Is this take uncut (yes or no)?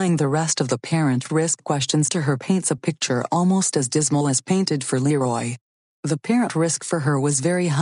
yes